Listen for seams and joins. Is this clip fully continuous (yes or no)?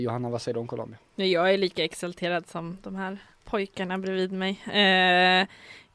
no